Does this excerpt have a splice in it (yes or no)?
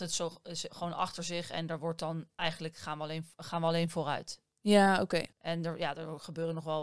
yes